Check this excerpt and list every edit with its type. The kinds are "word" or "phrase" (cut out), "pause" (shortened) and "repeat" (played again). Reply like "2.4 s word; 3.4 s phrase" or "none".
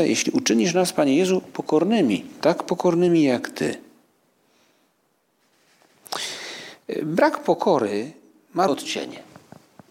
8.7 s word